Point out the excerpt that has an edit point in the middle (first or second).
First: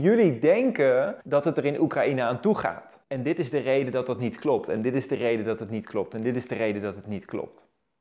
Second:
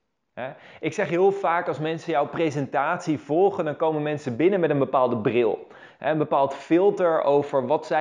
first